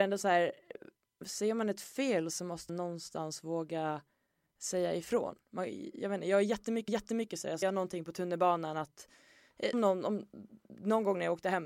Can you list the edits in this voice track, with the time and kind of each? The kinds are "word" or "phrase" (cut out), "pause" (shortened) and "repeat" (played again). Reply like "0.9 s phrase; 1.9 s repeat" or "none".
2.7 s word; 6.9 s repeat; 7.6 s word; 9.7 s word